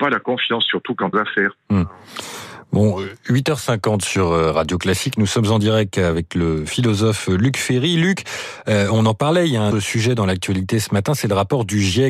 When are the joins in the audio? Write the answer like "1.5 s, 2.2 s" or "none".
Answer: 1.1 s, 9.7 s

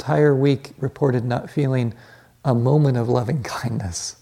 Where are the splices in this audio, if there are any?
none

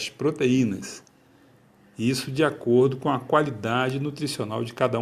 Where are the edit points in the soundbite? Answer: none

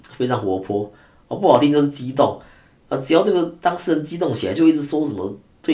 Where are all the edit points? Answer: none

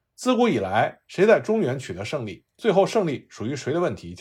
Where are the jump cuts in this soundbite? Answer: 2.5 s

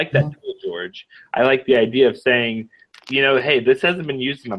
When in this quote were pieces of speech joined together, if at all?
none

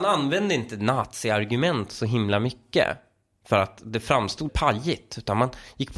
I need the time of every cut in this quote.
4.5 s

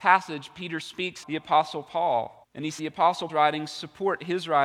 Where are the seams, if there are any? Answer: 1.2 s, 2.4 s, 2.8 s, 3.3 s

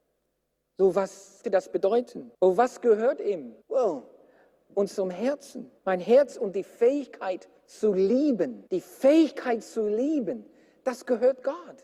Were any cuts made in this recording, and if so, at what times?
1.4 s, 2.3 s, 3.6 s, 5.8 s, 7.6 s, 8.7 s

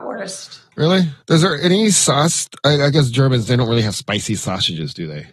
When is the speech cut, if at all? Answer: 1.2 s

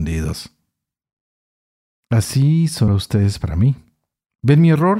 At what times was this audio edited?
2.9 s

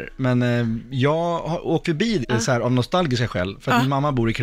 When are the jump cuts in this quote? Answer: 1.8 s, 2.2 s

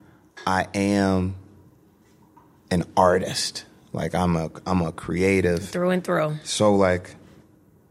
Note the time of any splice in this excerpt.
none

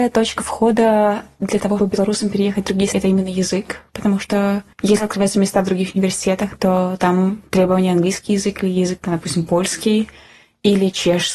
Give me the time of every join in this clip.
1.8 s, 2.9 s, 4.7 s

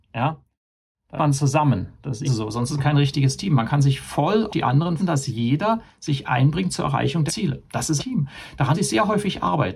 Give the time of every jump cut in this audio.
1.2 s, 2.3 s, 4.5 s, 5.0 s, 7.3 s, 8.0 s, 8.7 s

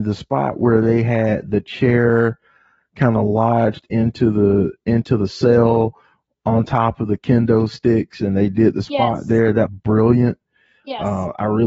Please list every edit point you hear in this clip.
9.7 s

